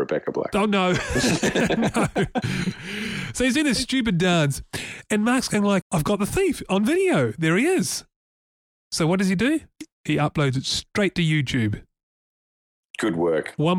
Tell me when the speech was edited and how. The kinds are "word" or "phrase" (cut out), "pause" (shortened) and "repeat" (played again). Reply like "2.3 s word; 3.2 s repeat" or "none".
5.8 s word